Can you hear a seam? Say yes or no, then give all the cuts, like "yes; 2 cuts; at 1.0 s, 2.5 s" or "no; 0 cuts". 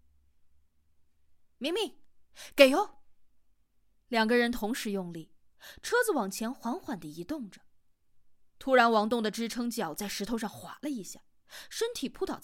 no; 0 cuts